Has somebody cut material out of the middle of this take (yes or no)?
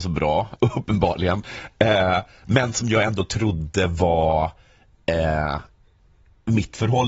no